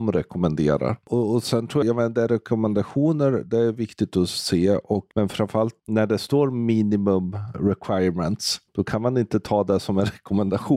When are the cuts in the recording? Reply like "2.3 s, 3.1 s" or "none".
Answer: 1.8 s